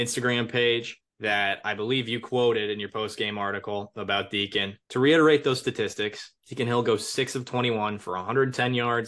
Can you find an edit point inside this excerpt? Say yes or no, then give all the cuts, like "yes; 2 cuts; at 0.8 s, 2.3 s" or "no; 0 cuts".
yes; 3 cuts; at 1.1 s, 4.8 s, 6.4 s